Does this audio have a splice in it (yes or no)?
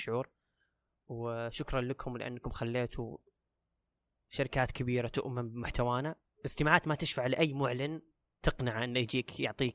no